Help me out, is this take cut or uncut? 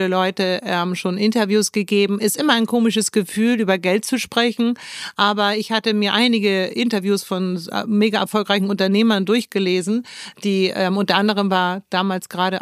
uncut